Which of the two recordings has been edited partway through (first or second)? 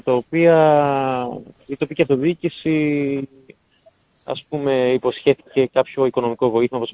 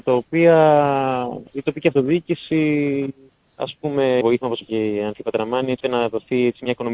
second